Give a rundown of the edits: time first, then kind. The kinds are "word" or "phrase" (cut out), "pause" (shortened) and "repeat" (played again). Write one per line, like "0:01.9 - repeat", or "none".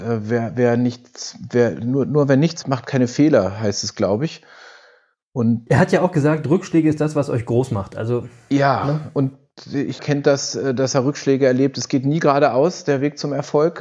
0:02.6 - word
0:10.0 - phrase